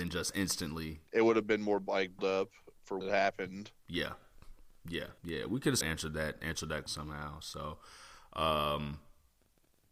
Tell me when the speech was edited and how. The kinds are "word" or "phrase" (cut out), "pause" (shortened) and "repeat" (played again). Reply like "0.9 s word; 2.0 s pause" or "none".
1.1 s pause; 2.2 s word; 3.0 s word; 3.8 s pause; 5.2 s pause; 5.8 s word; 6.9 s word